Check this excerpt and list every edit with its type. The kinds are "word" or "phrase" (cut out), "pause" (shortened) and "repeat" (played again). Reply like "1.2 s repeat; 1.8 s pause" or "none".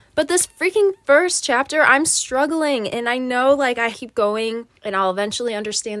3.9 s phrase; 4.7 s pause